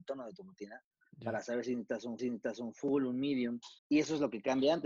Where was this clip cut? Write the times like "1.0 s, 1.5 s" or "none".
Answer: 2.2 s, 3.8 s